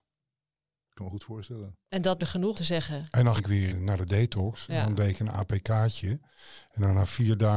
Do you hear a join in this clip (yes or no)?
yes